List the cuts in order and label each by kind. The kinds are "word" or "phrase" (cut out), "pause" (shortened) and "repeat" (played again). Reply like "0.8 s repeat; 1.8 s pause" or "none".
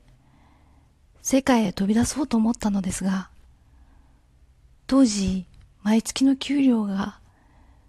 none

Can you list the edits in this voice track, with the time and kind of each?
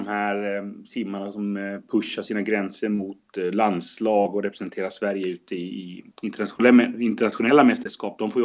none

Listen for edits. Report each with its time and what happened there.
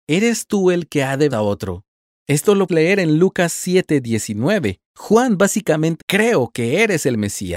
1.3 s phrase; 2.0 s pause; 2.7 s word; 4.9 s pause; 6.0 s phrase

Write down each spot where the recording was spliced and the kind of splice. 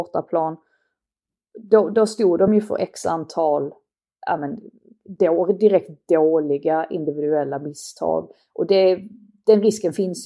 none

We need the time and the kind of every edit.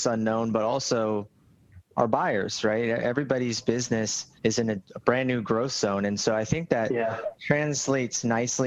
4.4 s pause; 4.9 s pause

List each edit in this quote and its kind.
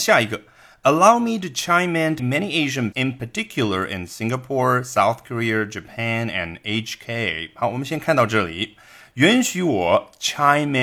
2.2 s word; 2.9 s word

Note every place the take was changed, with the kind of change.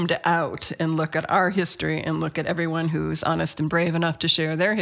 none

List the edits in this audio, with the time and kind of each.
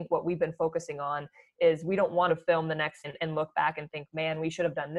2.3 s phrase; 3.0 s word

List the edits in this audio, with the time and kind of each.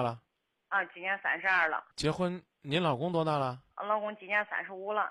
1.9 s pause; 3.7 s pause

